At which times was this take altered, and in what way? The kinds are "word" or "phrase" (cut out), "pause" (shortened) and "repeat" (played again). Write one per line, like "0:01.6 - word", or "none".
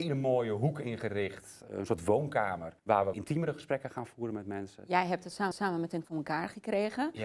0:02.8 - pause
0:03.1 - word
0:05.5 - repeat
0:06.0 - phrase